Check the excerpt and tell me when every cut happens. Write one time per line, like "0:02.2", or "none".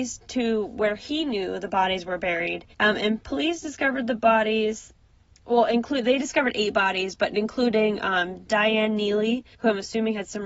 0:02.7
0:05.0
0:09.5